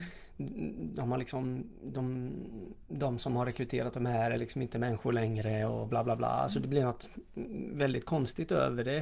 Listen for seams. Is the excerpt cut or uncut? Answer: uncut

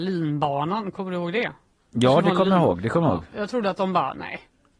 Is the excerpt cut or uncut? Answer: uncut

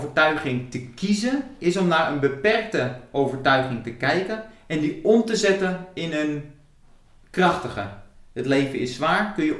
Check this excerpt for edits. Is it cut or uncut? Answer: uncut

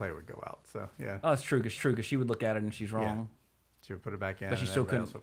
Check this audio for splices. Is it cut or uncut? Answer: cut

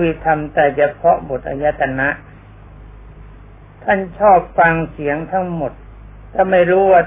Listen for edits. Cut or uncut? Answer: uncut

